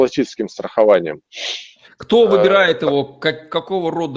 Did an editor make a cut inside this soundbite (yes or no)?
no